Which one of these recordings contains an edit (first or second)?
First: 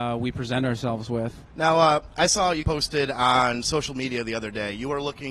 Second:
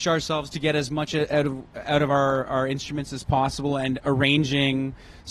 first